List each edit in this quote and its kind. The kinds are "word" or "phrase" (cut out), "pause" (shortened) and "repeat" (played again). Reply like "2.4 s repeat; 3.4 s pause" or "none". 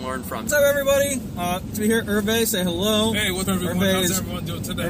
1.7 s word; 3.4 s word